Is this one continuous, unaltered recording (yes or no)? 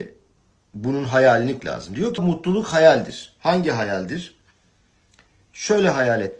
no